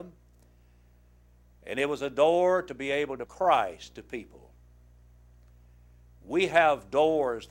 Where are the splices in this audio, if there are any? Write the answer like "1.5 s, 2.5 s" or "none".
3.3 s

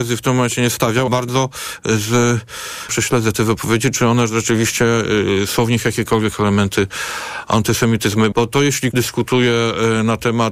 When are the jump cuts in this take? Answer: 1.1 s, 2.9 s, 8.3 s, 8.9 s

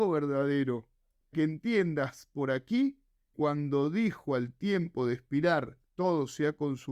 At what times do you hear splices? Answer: 1.3 s, 3.3 s, 5.9 s

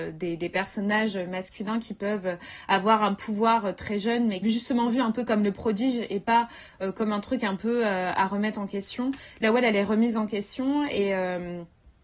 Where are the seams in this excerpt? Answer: 4.4 s

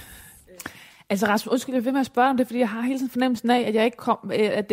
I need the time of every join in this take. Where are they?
none

